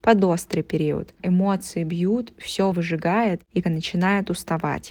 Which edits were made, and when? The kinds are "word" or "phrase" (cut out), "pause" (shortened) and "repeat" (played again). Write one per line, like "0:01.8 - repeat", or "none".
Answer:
0:01.2 - word
0:02.7 - word
0:03.6 - word